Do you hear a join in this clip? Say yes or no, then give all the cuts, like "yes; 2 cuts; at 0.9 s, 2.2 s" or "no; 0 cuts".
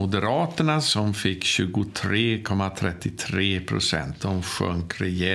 no; 0 cuts